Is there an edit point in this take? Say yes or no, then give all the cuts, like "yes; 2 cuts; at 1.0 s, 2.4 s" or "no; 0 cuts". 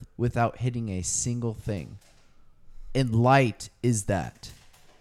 no; 0 cuts